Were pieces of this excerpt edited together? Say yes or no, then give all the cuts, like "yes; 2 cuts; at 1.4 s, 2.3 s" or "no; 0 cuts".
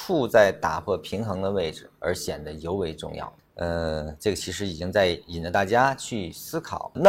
yes; 1 cut; at 1.9 s